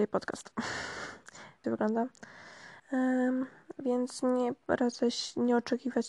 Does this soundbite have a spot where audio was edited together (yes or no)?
yes